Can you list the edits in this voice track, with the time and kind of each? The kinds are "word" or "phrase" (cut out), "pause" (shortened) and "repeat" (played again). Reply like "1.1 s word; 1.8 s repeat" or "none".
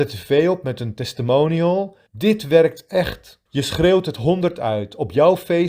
2.1 s pause; 3.5 s pause

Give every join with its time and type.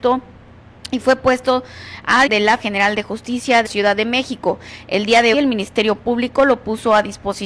2.3 s word; 2.6 s word; 3.6 s word; 5.3 s word

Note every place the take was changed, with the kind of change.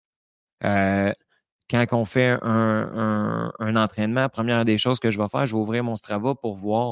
none

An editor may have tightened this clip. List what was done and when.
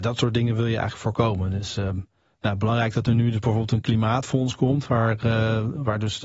none

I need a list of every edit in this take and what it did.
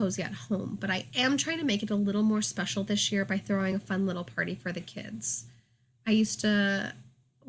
none

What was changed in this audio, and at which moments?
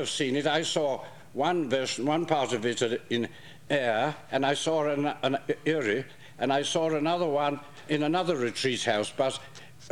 3.7 s word; 7.9 s word

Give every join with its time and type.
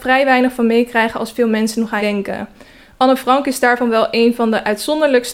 2.0 s word

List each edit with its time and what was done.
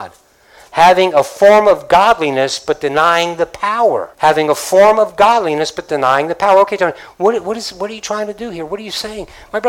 4.1 s pause

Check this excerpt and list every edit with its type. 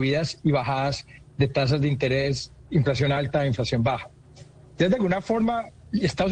none

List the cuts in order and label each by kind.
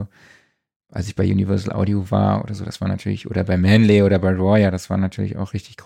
none

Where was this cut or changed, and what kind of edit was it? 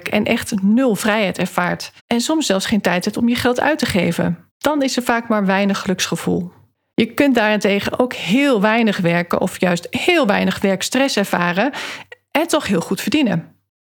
2.0 s pause; 4.5 s pause; 6.7 s pause

